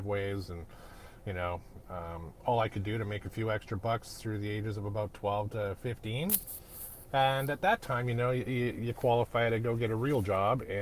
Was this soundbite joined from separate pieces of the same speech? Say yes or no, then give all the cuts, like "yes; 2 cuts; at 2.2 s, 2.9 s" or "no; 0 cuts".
no; 0 cuts